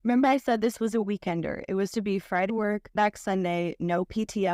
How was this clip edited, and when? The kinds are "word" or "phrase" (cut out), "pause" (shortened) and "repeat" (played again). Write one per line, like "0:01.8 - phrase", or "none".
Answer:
0:01.9 - word
0:02.5 - word
0:03.0 - word